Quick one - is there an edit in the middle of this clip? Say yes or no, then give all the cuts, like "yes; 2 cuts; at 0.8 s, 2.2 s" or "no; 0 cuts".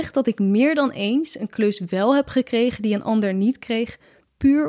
no; 0 cuts